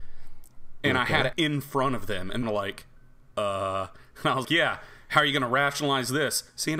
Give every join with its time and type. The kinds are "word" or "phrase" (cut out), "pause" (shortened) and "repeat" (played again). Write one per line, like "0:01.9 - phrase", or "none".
0:01.3 - word
0:02.4 - phrase
0:04.4 - word